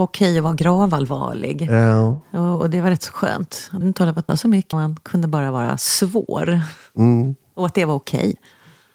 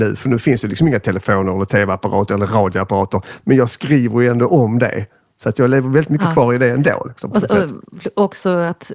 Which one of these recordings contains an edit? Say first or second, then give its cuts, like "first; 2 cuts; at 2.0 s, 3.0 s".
first; 3 cuts; at 3.8 s, 4.3 s, 4.7 s